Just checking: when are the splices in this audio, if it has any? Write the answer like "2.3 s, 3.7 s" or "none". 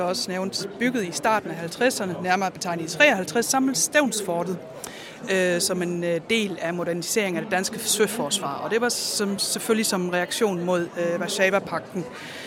none

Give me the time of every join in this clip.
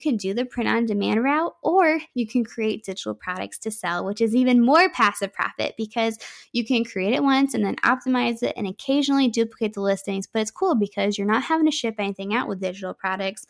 none

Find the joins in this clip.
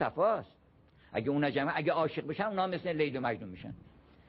none

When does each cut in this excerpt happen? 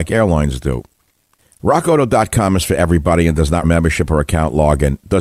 3.6 s

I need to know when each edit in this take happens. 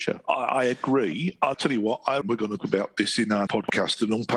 1.5 s, 2.2 s, 2.6 s, 3.5 s

